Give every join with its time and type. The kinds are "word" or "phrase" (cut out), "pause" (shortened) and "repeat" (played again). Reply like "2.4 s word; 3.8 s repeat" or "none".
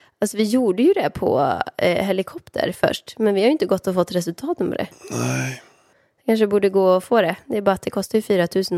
none